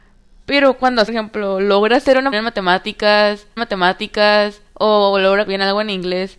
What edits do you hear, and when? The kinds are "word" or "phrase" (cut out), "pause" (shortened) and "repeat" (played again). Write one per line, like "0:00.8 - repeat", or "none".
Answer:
0:01.1 - phrase
0:02.3 - word
0:03.6 - repeat
0:05.5 - word